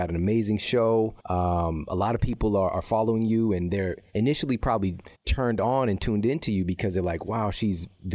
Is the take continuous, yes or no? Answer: no